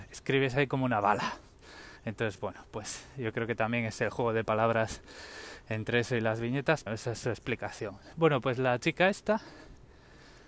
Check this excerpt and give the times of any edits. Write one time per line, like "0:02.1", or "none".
0:02.0
0:06.9
0:08.1